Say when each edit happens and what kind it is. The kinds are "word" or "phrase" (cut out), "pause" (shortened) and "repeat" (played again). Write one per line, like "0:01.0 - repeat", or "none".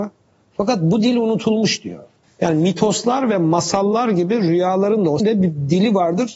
0:05.2 - word

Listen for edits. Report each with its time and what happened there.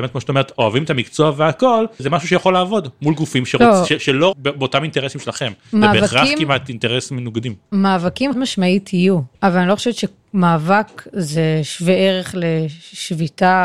0:02.0 - word
0:04.3 - phrase
0:08.3 - word
0:09.3 - pause

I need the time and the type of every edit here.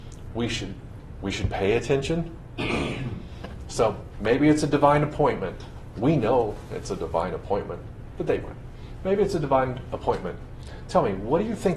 none

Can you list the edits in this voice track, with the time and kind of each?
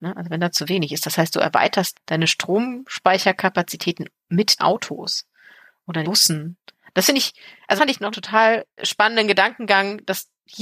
0:01.9 - word
0:04.6 - word
0:06.0 - word
0:07.8 - word
0:08.1 - word
0:08.8 - word

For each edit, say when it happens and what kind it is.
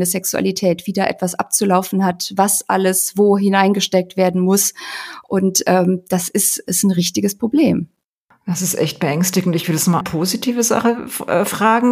0:10.0 - word

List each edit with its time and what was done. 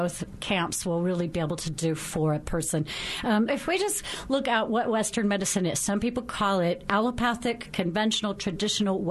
0:03.5 - word

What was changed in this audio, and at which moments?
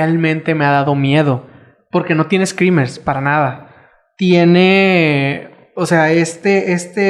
none

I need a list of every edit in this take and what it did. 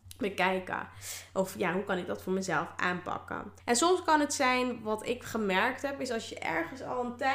0:03.6 - pause

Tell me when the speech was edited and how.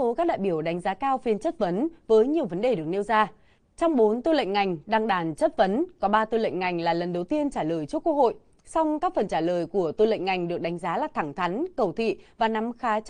none

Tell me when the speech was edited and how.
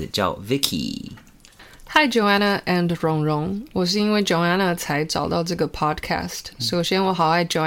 none

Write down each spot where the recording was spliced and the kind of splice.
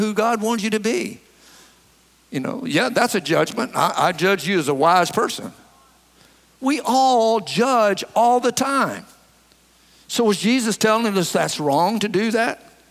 none

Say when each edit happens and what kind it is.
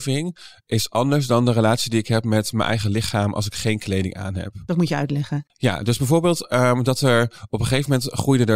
none

